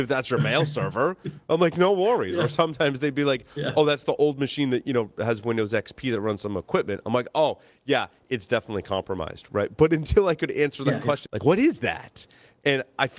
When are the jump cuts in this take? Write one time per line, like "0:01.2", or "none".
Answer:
0:11.3

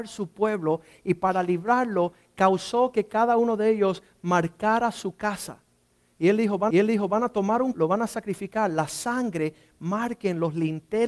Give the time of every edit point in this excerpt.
0:06.7
0:07.7

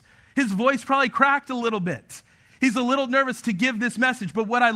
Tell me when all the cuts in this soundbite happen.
none

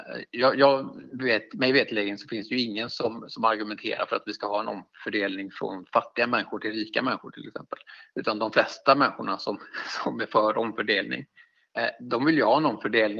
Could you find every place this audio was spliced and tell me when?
none

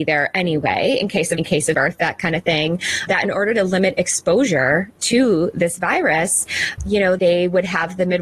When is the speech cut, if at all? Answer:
0:01.4
0:01.7
0:03.1
0:06.8
0:07.2

